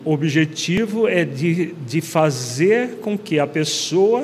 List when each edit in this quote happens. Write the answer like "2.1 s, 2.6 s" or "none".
none

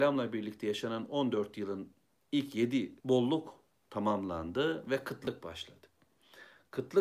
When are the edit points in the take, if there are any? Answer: 3.0 s

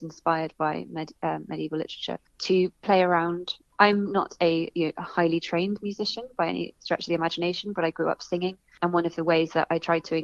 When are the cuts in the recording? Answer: none

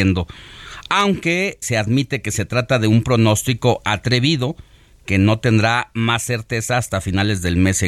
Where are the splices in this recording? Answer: 1.6 s

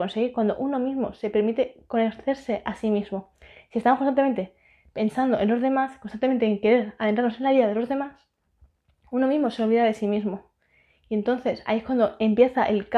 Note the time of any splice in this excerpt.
none

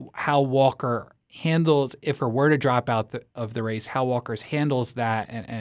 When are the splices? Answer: 2.2 s

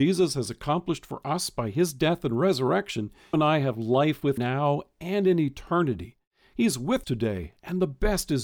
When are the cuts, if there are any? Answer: 3.3 s, 4.4 s, 7.0 s

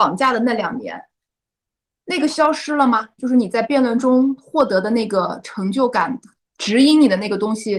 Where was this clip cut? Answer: none

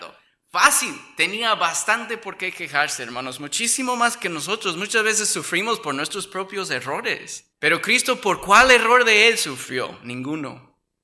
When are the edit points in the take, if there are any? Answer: 7.5 s

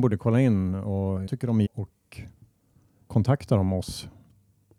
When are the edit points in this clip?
1.3 s, 1.6 s, 3.1 s

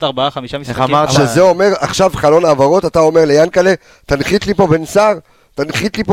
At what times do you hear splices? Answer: none

